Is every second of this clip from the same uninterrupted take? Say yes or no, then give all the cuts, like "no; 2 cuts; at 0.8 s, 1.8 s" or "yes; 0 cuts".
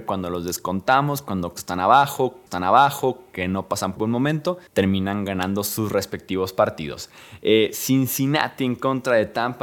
no; 4 cuts; at 1.6 s, 2.5 s, 4.0 s, 4.7 s